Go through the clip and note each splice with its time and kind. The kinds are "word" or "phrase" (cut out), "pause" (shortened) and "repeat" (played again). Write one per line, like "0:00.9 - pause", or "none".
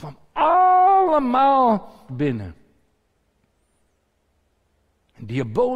0:02.1 - phrase